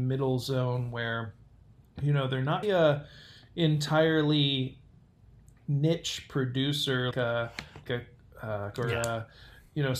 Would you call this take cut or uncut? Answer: cut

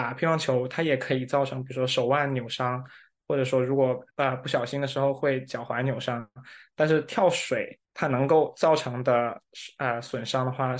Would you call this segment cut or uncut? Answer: cut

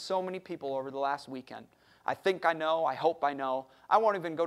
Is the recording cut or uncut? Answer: uncut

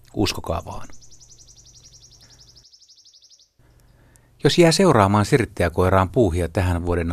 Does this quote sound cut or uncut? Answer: uncut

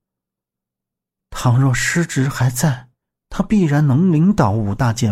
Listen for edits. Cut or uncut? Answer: uncut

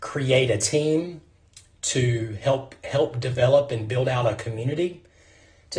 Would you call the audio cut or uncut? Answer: uncut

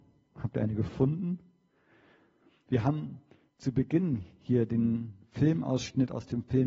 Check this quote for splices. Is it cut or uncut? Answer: uncut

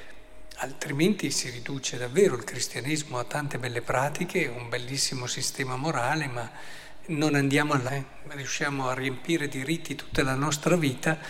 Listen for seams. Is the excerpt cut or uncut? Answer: cut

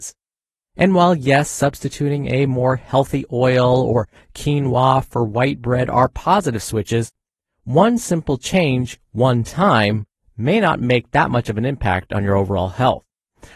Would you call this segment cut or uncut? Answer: uncut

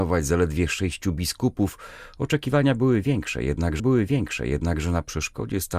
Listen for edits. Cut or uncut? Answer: cut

